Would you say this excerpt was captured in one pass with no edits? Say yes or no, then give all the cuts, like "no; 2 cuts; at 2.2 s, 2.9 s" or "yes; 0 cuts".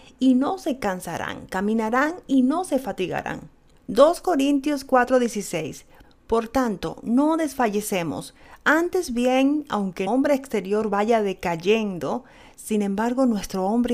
no; 1 cut; at 10.1 s